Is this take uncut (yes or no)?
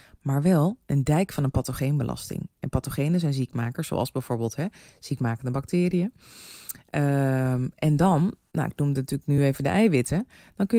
yes